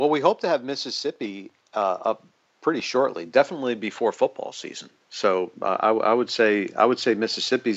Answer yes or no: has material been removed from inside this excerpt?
no